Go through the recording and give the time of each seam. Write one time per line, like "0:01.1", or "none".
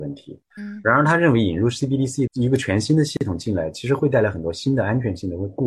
0:02.3